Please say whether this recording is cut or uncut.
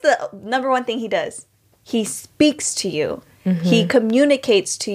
uncut